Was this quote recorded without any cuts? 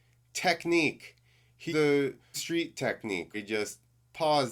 no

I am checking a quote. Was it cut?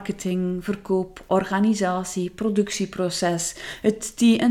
no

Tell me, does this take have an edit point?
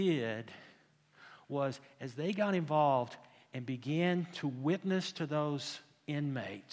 no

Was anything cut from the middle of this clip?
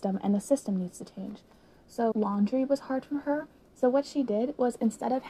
yes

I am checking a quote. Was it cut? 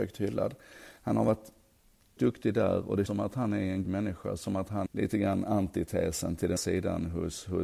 yes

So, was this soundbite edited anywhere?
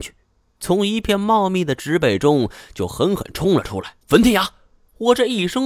yes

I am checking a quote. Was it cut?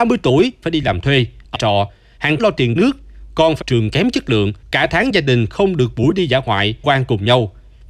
yes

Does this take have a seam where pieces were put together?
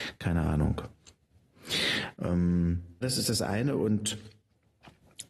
yes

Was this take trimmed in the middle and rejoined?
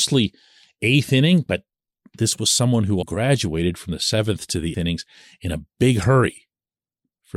yes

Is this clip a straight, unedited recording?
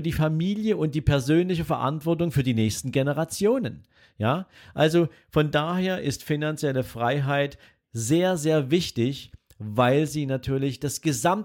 yes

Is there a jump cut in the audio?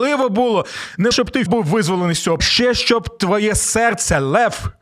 yes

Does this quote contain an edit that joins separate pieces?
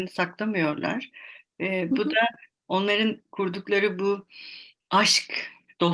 no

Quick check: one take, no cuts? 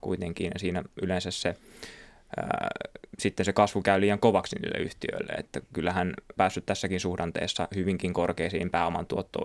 no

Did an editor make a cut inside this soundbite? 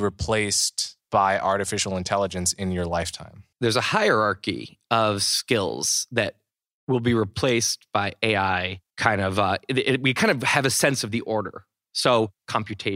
yes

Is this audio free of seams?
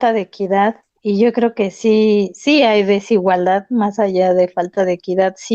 yes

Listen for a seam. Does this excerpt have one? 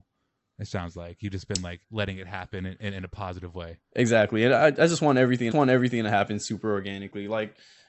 yes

